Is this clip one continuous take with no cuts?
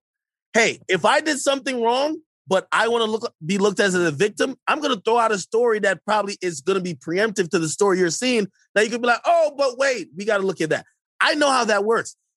yes; 0 cuts

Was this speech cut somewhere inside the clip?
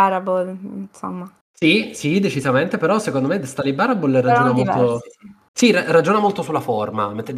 yes; 2 cuts; at 1.4 s, 5.5 s

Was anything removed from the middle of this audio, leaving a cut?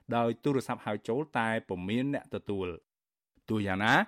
no; 0 cuts

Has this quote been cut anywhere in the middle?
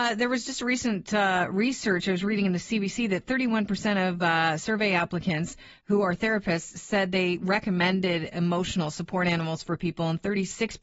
no; 0 cuts

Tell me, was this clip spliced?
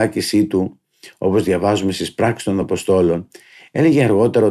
no; 0 cuts

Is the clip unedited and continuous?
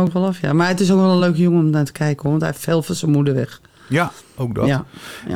yes; 0 cuts

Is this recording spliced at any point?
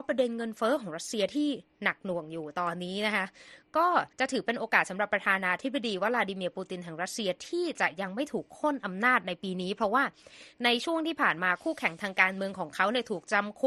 yes; 1 cut; at 4.1 s

